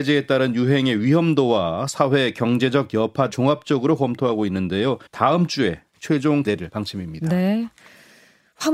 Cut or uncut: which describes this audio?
cut